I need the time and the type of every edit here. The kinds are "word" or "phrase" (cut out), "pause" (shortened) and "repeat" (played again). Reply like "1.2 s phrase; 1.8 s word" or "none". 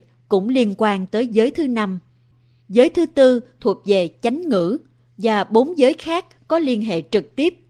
none